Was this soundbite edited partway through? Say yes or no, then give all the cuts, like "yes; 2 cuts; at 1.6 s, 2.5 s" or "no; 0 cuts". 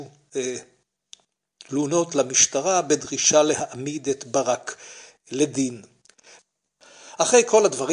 no; 0 cuts